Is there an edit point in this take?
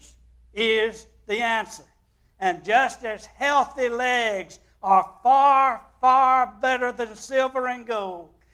no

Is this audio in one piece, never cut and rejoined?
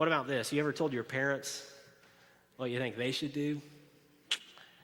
yes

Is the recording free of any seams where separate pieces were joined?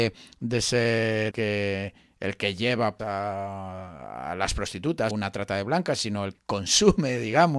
no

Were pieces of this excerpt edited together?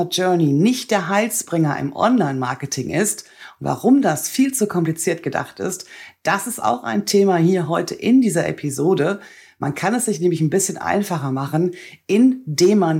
no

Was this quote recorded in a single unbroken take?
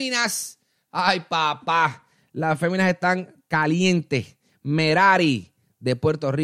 yes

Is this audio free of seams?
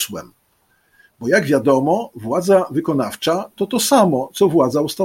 no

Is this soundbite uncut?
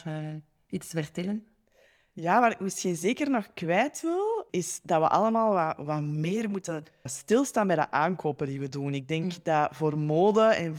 yes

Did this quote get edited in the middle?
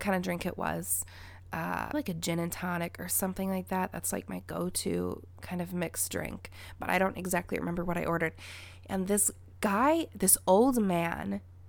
yes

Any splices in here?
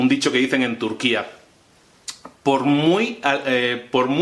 no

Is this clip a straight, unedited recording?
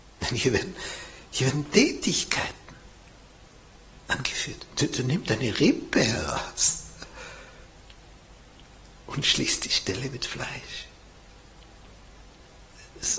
yes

